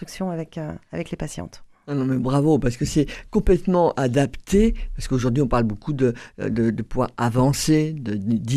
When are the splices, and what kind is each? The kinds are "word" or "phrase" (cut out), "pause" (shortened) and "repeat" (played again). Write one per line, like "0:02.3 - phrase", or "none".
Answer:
none